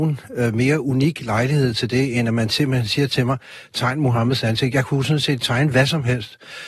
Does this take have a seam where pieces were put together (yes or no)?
no